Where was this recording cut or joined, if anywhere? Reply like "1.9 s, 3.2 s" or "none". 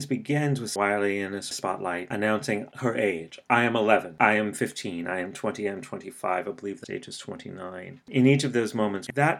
6.8 s